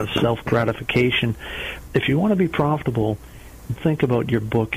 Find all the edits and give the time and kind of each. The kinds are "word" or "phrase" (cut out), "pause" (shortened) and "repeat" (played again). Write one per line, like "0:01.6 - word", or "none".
0:01.9 - word
0:03.8 - word